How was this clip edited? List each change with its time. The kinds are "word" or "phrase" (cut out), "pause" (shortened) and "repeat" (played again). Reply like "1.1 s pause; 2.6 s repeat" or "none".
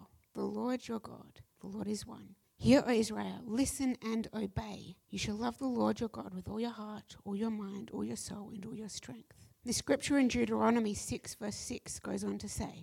1.5 s pause; 2.4 s pause; 5.0 s pause; 9.5 s pause